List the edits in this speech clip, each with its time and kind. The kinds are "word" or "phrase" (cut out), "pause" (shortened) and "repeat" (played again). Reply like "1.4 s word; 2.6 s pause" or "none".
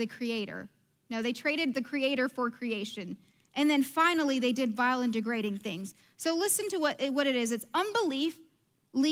none